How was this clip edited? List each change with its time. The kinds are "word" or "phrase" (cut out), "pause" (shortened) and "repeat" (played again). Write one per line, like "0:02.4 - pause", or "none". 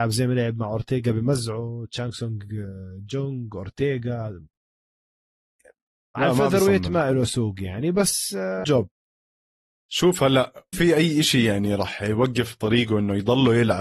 0:08.6 - word
0:10.7 - phrase

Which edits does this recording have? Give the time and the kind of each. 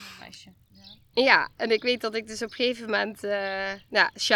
none

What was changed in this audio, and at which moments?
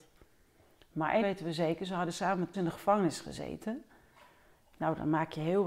0:01.2 - word
0:02.5 - word

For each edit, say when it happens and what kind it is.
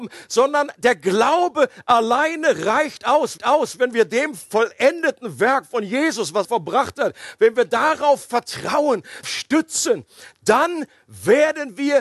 0:03.4 - repeat
0:06.4 - word
0:09.2 - phrase

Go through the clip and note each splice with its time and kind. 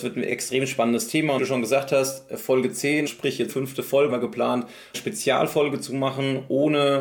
0:01.4 - word
0:03.1 - word
0:03.5 - word
0:04.1 - word
0:04.9 - word

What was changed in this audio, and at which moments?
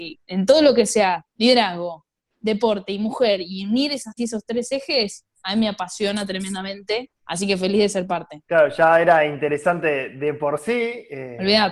0:04.2 - phrase
0:07.2 - pause
0:08.5 - pause

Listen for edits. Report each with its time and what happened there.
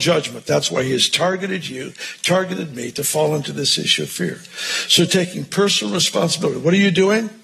none

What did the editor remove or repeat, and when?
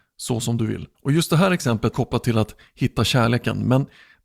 0:00.9 - pause
0:01.9 - phrase

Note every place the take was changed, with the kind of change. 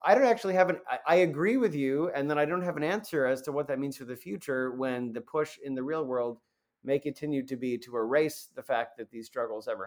none

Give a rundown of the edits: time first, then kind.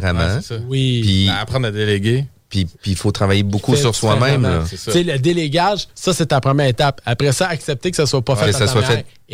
0:02.7 - pause

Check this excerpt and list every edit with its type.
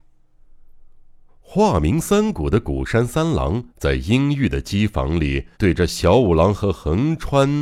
0:03.7 - pause
0:05.5 - pause

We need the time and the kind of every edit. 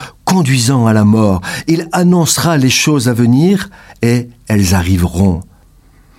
none

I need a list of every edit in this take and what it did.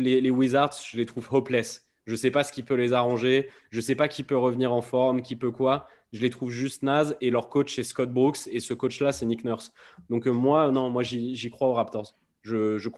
none

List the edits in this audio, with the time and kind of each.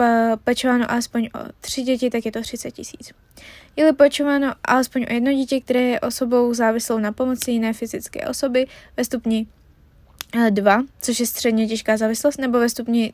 none

